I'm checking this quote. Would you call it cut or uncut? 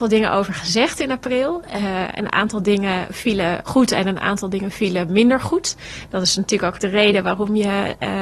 cut